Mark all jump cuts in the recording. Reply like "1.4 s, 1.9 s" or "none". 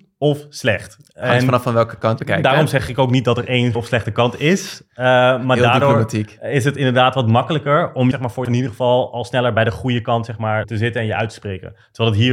2.2 s, 3.7 s, 8.1 s, 8.4 s, 10.6 s

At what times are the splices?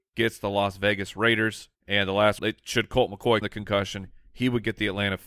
1.7 s, 2.4 s, 3.4 s

